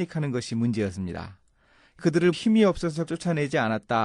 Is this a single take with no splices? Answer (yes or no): no